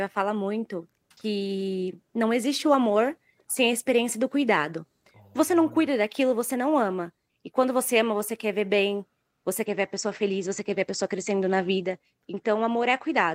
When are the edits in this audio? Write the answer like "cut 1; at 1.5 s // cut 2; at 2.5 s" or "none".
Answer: none